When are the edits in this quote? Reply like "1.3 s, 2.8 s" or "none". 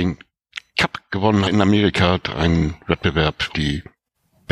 1.5 s, 3.5 s